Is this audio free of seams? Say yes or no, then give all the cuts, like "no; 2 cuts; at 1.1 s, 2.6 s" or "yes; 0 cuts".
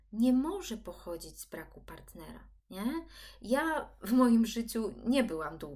no; 1 cut; at 2.6 s